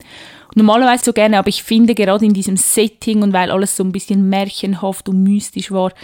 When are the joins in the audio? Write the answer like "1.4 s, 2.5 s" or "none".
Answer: 1.0 s